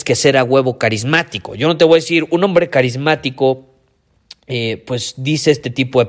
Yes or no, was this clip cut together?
no